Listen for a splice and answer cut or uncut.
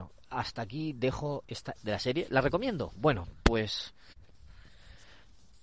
cut